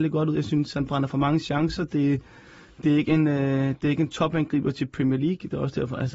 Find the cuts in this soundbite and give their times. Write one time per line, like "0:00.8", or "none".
none